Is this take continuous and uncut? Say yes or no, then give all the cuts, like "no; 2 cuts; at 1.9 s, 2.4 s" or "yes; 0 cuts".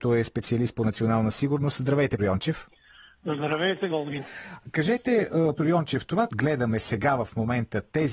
no; 4 cuts; at 2.2 s, 3.9 s, 5.6 s, 6.3 s